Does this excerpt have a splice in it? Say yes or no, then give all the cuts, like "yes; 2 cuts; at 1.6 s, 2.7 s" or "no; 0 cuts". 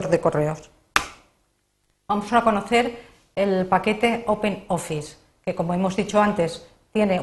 no; 0 cuts